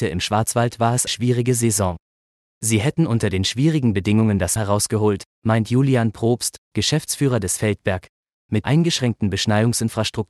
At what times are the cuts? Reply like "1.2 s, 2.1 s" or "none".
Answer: 1.1 s, 4.6 s, 7.6 s, 8.6 s